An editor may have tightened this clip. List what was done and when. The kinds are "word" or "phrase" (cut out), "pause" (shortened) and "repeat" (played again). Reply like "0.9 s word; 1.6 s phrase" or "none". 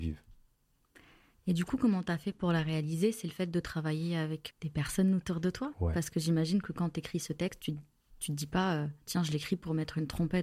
4.5 s word